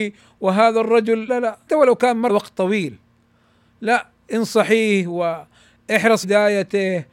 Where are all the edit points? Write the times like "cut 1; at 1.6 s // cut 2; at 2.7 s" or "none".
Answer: cut 1; at 1.3 s // cut 2; at 1.7 s // cut 3; at 2.3 s // cut 4; at 6.2 s